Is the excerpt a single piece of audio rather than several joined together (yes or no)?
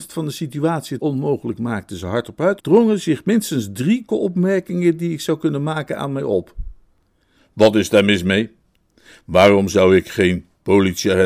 no